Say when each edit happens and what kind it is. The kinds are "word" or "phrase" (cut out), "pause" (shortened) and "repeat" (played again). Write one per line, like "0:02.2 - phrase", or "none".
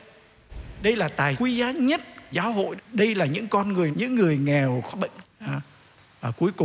0:01.4 - word
0:02.3 - word
0:02.8 - word
0:03.9 - word
0:04.9 - word
0:05.2 - word